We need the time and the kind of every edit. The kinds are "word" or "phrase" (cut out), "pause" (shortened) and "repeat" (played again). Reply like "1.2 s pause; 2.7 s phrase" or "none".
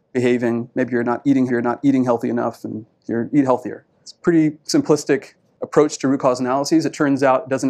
1.5 s repeat; 2.9 s pause; 3.9 s pause